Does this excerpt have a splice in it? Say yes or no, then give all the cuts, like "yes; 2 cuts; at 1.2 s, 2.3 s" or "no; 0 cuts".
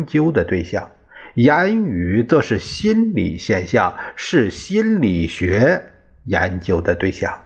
no; 0 cuts